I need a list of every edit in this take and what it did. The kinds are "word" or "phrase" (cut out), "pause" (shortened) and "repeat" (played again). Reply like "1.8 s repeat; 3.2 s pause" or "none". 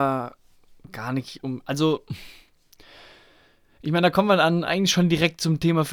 none